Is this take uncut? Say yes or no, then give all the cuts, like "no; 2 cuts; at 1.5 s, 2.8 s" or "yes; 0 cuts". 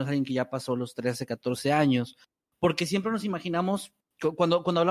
yes; 0 cuts